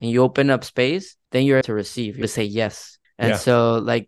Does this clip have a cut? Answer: yes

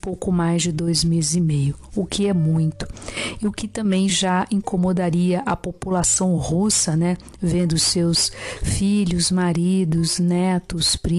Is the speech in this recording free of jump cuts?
yes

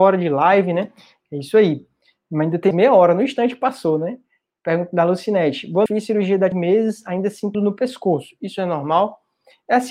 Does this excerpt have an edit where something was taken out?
yes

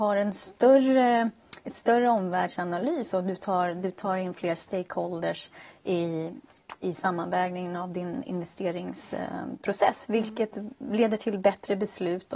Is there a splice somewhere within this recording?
no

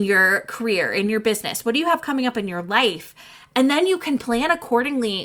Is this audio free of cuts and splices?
yes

